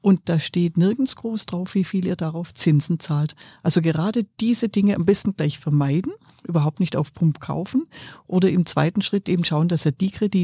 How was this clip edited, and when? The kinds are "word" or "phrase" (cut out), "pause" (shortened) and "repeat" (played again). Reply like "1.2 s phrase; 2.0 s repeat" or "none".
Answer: none